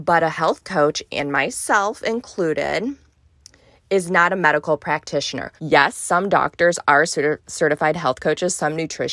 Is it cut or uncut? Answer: cut